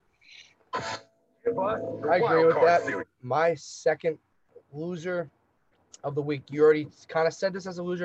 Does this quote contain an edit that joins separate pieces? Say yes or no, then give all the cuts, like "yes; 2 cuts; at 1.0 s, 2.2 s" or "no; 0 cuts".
no; 0 cuts